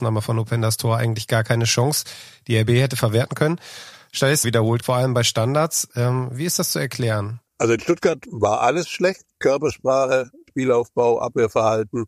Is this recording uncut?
no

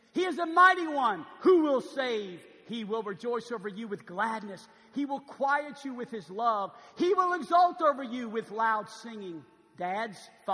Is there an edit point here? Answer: no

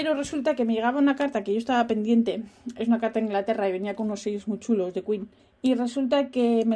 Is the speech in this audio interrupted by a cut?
no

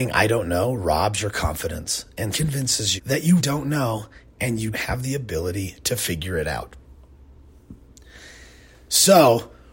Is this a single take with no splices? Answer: no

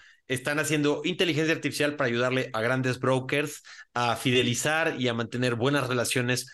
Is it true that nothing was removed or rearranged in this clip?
yes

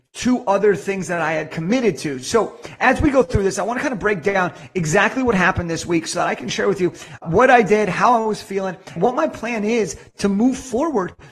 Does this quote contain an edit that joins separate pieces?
yes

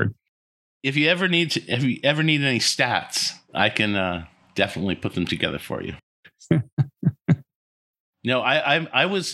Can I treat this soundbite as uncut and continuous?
yes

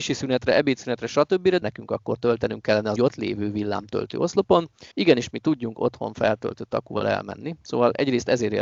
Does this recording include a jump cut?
yes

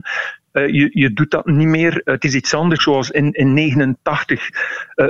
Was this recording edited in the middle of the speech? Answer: yes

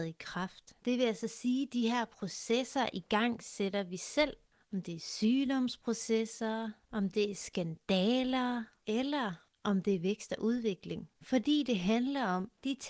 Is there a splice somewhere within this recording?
no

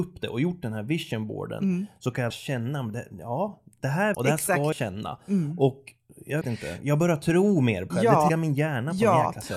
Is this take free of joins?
no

